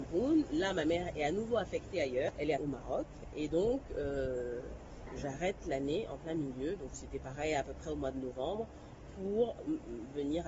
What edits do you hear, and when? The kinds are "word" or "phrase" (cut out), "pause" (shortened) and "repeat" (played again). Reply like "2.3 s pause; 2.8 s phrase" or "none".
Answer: 2.6 s word